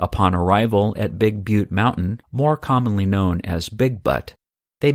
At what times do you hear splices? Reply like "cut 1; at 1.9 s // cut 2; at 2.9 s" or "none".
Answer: cut 1; at 2.2 s